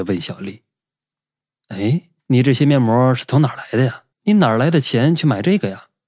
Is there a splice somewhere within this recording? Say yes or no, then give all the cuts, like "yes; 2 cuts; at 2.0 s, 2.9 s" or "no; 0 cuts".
yes; 2 cuts; at 2.2 s, 4.1 s